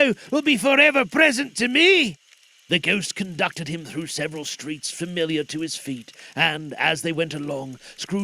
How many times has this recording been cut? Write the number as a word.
zero